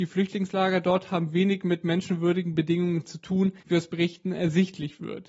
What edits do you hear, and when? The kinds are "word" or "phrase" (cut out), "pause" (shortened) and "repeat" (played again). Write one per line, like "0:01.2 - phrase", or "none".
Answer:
0:03.6 - pause